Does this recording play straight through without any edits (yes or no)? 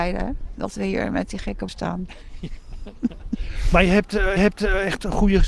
no